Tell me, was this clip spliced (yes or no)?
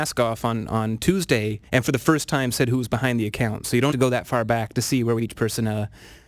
yes